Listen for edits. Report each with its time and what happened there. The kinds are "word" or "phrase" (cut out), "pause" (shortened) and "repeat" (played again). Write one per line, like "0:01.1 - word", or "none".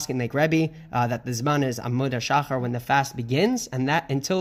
none